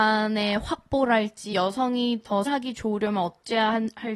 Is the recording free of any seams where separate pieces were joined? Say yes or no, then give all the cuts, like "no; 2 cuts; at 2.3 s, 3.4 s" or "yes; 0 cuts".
no; 2 cuts; at 1.5 s, 2.5 s